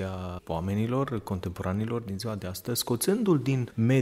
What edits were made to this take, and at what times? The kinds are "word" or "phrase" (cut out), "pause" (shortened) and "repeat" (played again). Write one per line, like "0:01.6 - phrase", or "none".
none